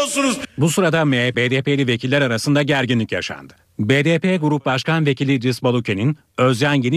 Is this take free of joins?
no; 1 cut; at 1.3 s

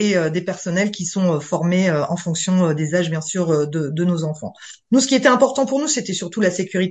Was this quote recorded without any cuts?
yes; 0 cuts

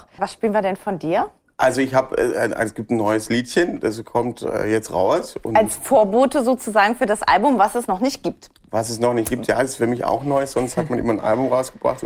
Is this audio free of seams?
yes; 0 cuts

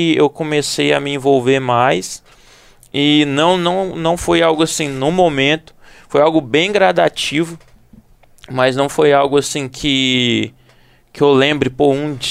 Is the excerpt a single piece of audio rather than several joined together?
yes; 0 cuts

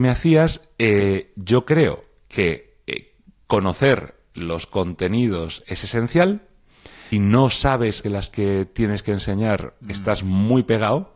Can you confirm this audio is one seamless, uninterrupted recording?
no; 2 cuts; at 7.1 s, 8.0 s

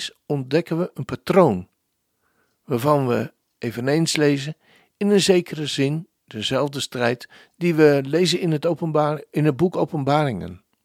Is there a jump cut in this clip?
no; 0 cuts

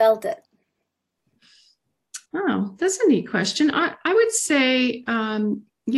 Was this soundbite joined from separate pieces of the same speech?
yes; 1 cut; at 2.3 s

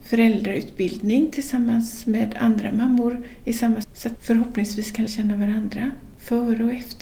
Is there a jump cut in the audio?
yes; 3 cuts; at 3.8 s, 4.2 s, 5.1 s

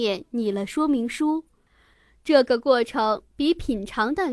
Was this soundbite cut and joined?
no; 0 cuts

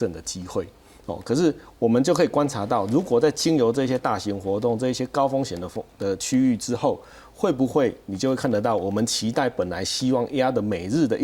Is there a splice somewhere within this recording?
no; 0 cuts

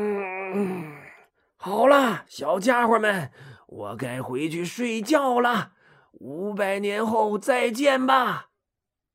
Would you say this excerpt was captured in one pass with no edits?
yes; 0 cuts

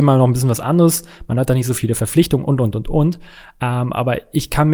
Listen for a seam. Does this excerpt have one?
no; 0 cuts

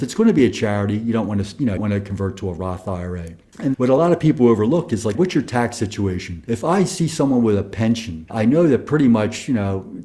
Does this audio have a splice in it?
yes; 3 cuts; at 1.8 s, 3.7 s, 5.1 s

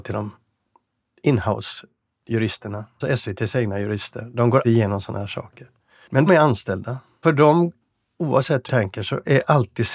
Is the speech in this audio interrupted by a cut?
yes; 6 cuts; at 3.0 s, 4.6 s, 6.3 s, 7.2 s, 7.8 s, 8.7 s

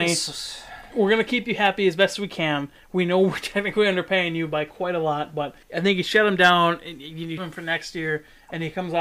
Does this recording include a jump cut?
yes; 2 cuts; at 5.6 s, 7.4 s

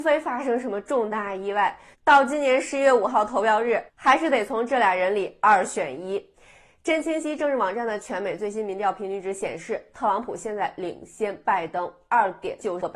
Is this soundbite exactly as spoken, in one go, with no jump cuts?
no; 1 cut; at 3.9 s

